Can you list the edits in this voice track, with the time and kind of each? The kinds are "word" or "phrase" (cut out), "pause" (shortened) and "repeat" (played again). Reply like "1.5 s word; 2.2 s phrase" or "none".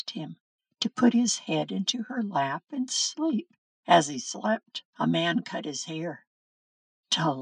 3.7 s pause; 4.9 s pause